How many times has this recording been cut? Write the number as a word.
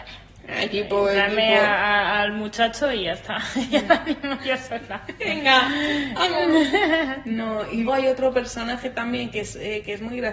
one